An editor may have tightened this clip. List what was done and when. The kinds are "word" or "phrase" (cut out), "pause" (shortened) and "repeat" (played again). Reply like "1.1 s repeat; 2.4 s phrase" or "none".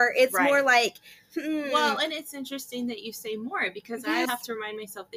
4.2 s word